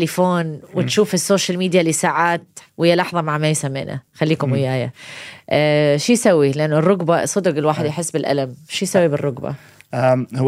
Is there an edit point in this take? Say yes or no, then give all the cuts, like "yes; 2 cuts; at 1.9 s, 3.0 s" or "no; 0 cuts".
yes; 2 cuts; at 2.7 s, 4.1 s